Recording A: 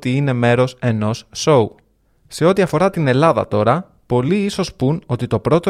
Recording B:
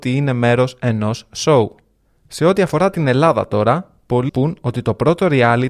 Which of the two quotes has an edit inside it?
B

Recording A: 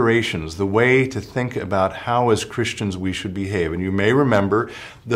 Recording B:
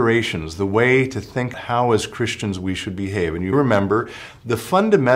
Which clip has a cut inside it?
B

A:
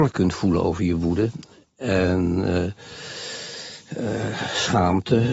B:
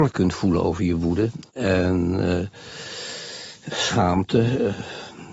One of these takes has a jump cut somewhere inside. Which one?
B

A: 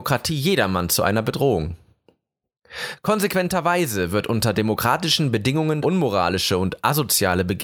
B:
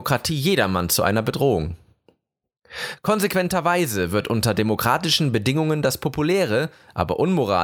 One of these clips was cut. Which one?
A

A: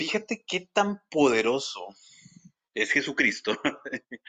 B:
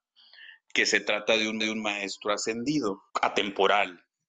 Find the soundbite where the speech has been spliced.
B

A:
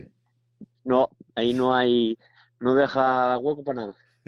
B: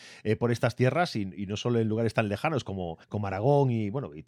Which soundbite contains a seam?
B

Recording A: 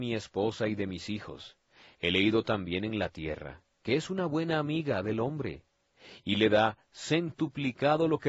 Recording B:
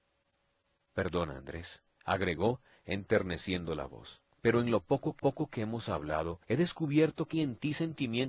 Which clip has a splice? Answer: B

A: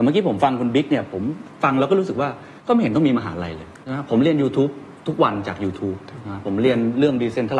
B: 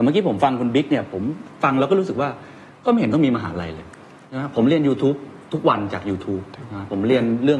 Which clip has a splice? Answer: A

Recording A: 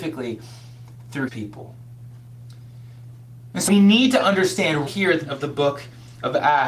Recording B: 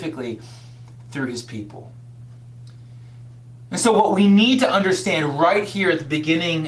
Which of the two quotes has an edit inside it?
A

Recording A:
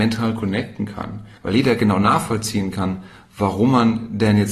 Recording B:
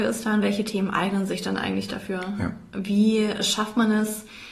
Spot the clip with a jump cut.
A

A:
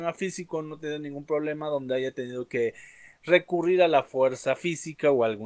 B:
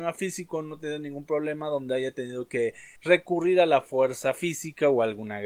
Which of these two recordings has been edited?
B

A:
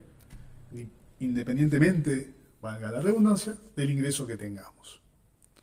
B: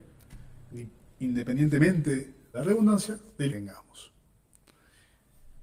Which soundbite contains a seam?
B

